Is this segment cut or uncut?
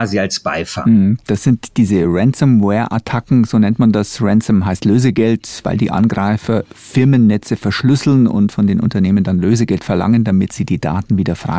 uncut